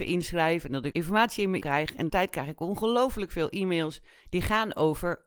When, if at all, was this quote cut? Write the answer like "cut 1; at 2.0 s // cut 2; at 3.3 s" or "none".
cut 1; at 0.9 s // cut 2; at 1.6 s // cut 3; at 2.1 s

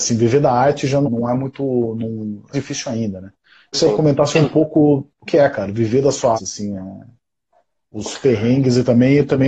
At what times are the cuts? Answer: cut 1; at 1.1 s // cut 2; at 2.5 s // cut 3; at 3.7 s // cut 4; at 5.3 s // cut 5; at 6.3 s

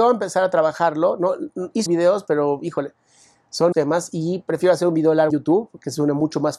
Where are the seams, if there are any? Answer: cut 1; at 1.9 s // cut 2; at 3.7 s // cut 3; at 5.3 s

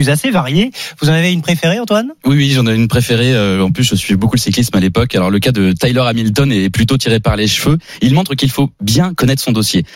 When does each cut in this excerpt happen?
cut 1; at 2.2 s

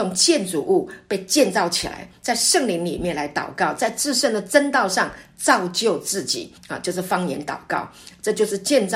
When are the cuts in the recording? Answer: cut 1; at 6.6 s

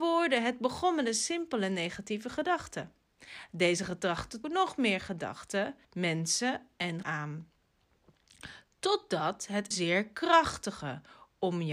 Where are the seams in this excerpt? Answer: cut 1; at 4.4 s // cut 2; at 5.8 s // cut 3; at 7.0 s // cut 4; at 9.7 s

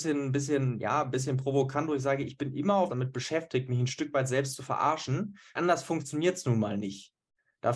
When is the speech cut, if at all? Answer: cut 1; at 2.9 s // cut 2; at 5.5 s

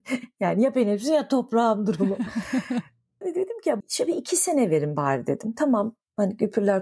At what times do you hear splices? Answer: cut 1; at 3.2 s // cut 2; at 3.8 s

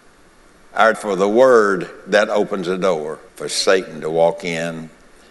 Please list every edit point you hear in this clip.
cut 1; at 0.9 s // cut 2; at 3.3 s

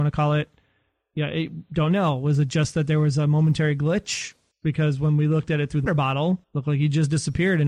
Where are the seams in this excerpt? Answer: cut 1; at 4.5 s // cut 2; at 5.9 s // cut 3; at 6.4 s

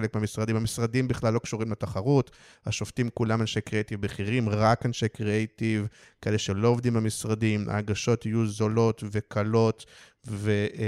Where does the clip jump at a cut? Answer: none

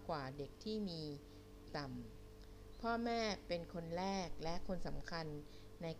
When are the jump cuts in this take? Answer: cut 1; at 1.7 s

